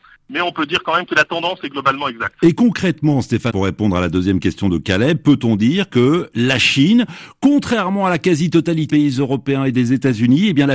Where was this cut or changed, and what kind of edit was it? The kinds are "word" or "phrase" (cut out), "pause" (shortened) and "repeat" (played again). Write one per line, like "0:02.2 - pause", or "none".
0:03.5 - word
0:08.9 - word